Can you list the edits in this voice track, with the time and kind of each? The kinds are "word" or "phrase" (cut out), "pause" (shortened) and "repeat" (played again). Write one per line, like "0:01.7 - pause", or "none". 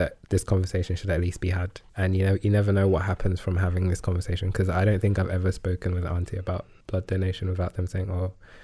0:01.9 - pause
0:06.8 - pause